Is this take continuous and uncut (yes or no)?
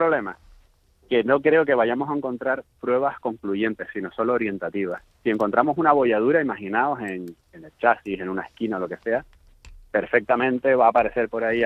yes